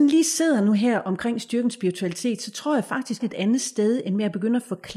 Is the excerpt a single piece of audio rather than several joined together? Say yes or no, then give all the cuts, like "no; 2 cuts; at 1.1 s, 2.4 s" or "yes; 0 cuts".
no; 1 cut; at 3.2 s